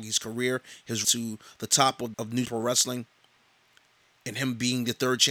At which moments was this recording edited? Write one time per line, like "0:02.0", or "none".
0:01.0
0:02.1
0:02.4